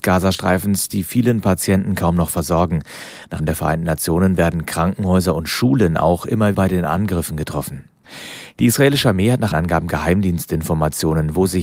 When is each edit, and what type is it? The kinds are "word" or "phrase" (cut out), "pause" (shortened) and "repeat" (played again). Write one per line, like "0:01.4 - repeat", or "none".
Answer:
0:03.4 - word
0:06.5 - word
0:09.5 - word